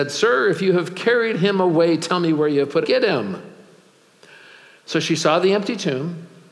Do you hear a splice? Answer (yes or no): yes